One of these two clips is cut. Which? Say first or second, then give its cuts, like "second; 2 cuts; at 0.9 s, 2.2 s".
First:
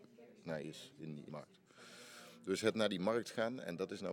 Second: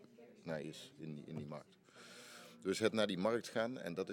first; 1 cut; at 1.3 s